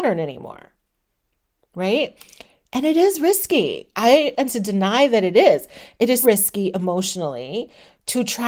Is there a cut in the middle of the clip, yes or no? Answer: yes